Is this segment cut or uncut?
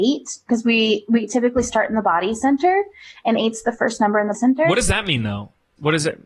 cut